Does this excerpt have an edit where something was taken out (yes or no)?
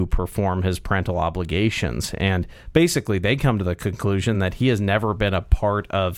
no